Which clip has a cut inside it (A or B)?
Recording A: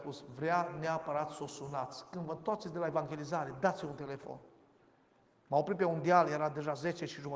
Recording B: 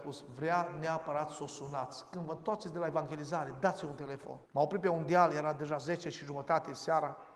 B